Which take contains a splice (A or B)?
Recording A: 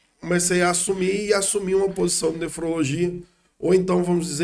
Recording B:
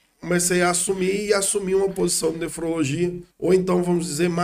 B